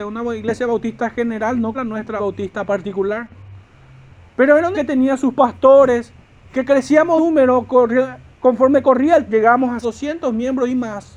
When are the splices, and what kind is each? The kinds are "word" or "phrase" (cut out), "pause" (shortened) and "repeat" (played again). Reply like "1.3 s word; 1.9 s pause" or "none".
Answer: 1.7 s word; 2.2 s word; 4.7 s word; 7.2 s word; 9.3 s word; 9.8 s word